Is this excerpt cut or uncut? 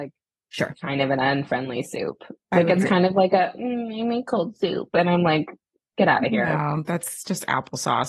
uncut